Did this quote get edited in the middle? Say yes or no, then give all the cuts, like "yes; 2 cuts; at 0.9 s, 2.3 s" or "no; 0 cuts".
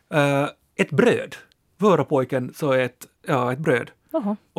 yes; 2 cuts; at 1.6 s, 3.2 s